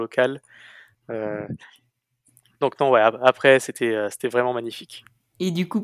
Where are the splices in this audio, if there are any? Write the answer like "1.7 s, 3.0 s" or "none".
none